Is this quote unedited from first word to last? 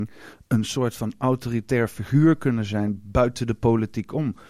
yes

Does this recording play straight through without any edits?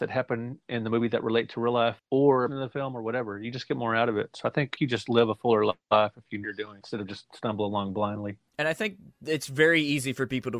no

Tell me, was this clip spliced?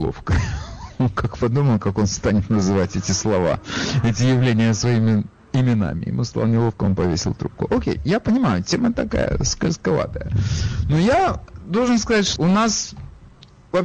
yes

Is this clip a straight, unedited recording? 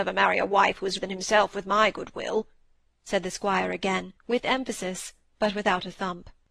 no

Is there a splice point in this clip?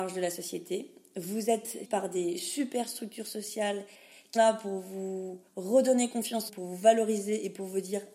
yes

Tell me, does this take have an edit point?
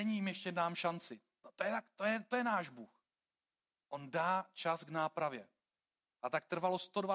no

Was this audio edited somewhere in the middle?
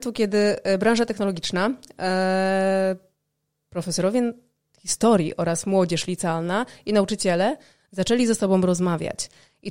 no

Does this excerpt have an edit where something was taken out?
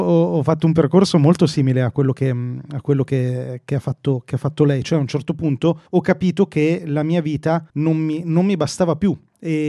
yes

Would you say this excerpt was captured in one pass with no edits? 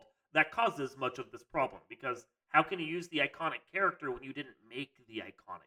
yes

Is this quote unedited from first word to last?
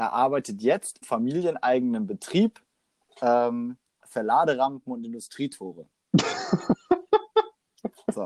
no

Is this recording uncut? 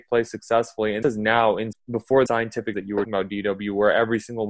no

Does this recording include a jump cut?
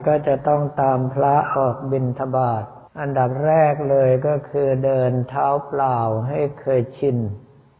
yes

